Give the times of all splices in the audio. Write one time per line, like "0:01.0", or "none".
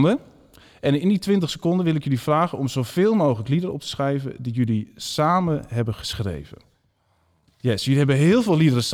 none